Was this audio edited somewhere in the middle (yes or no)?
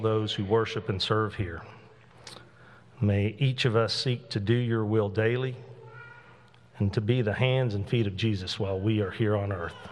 no